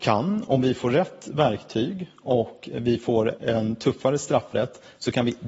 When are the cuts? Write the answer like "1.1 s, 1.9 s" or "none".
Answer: 3.4 s